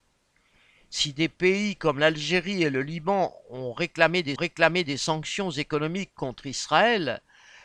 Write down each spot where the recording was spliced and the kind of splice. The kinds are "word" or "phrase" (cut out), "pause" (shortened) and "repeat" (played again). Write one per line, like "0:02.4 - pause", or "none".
0:04.4 - repeat

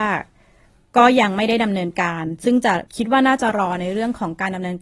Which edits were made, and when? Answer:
0:02.9 - pause

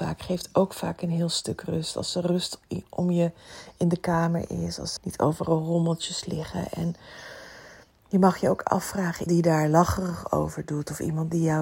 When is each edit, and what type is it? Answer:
0:05.0 - word
0:09.3 - word

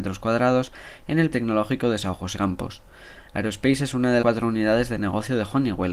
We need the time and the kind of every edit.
0:01.3 - word
0:02.4 - word
0:04.2 - word

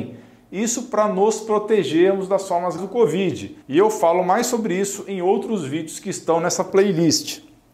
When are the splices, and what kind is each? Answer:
0:02.8 - word
0:03.6 - pause

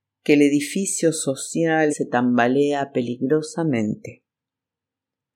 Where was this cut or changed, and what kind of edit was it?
0:01.9 - phrase

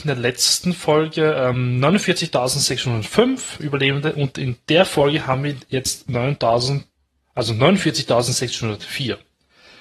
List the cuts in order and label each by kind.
none

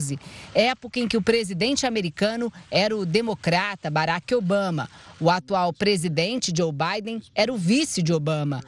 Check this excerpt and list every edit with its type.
none

